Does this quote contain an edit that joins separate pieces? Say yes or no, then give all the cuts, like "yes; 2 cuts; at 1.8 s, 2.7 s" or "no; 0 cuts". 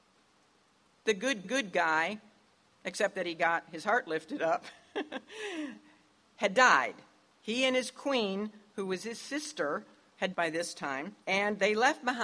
yes; 3 cuts; at 1.4 s, 10.3 s, 11.2 s